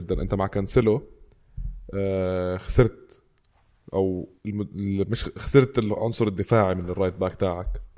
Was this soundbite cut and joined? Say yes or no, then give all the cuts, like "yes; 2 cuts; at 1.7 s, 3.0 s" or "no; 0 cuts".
yes; 1 cut; at 4.4 s